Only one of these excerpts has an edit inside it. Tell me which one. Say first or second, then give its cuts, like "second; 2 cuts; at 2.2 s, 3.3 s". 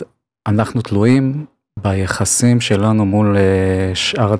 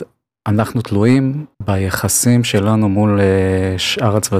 second; 1 cut; at 1.5 s